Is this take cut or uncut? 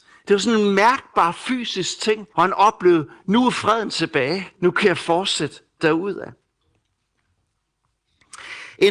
cut